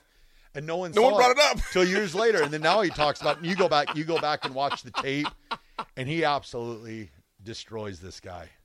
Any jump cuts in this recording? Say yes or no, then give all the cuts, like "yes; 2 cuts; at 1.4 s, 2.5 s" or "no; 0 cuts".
no; 0 cuts